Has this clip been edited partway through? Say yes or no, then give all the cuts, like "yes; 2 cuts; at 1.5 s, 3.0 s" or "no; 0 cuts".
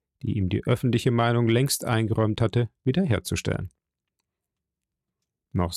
no; 0 cuts